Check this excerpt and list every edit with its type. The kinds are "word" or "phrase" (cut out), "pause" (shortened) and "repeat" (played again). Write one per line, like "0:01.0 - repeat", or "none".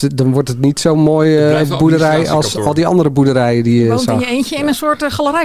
none